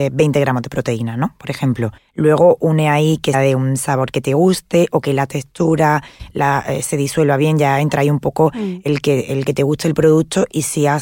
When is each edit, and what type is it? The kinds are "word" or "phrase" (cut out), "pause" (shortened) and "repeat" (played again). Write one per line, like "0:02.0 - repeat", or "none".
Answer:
0:02.0 - pause
0:03.3 - word